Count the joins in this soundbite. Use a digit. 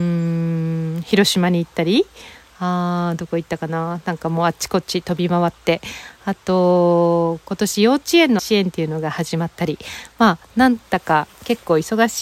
1